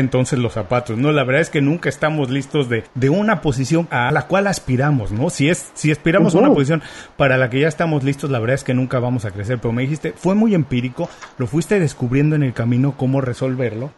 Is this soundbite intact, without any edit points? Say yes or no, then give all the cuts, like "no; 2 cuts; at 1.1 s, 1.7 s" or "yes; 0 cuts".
yes; 0 cuts